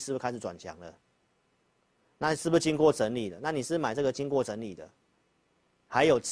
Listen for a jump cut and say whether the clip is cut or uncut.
uncut